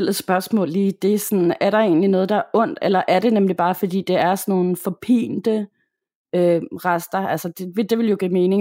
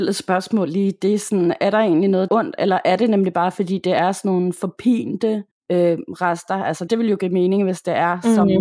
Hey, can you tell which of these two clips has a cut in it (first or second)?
second